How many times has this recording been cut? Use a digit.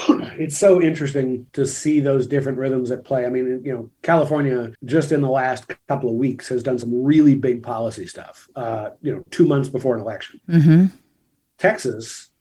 2